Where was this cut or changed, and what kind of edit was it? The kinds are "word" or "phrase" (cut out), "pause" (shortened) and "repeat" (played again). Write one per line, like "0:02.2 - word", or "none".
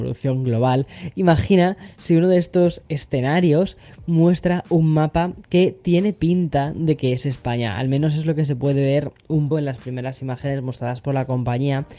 0:09.5 - word

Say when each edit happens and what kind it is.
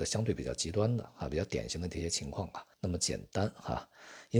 0:02.7 - pause

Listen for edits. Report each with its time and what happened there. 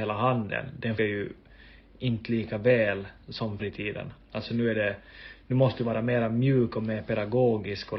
0:01.0 - word
0:03.6 - word

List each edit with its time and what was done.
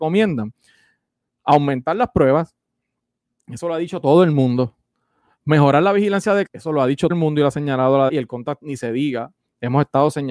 0:06.5 - word
0:07.1 - word
0:08.1 - word
0:08.6 - word

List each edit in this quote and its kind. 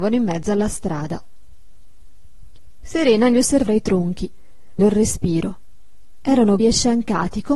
0:03.7 - word
0:04.8 - word
0:06.6 - word

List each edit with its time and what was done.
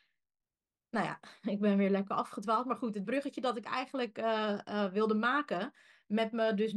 none

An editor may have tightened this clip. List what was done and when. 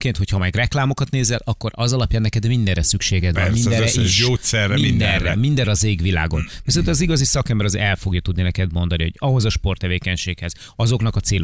none

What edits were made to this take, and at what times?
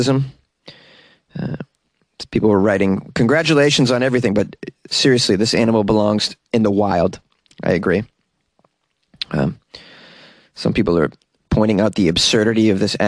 none

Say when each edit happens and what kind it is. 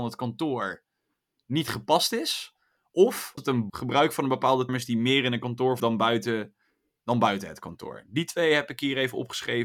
0:03.4 - word
0:03.7 - word
0:04.7 - word
0:05.8 - word

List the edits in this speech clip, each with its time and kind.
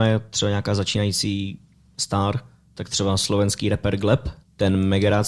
none

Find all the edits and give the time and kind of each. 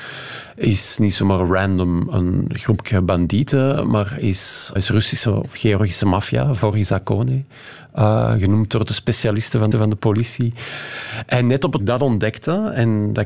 0:04.8 - phrase
0:09.7 - repeat
0:11.8 - phrase

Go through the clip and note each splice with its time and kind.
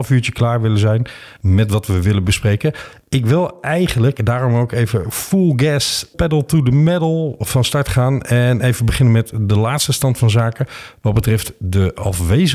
none

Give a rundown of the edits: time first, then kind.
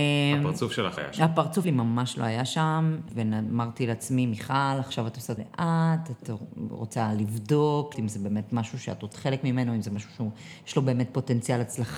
0:01.0 - word
0:01.6 - word
0:03.1 - word
0:05.4 - word
0:07.9 - word
0:09.1 - word

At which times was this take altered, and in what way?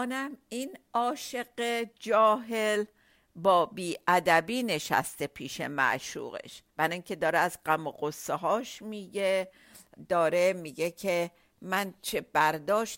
0:06.7 - pause

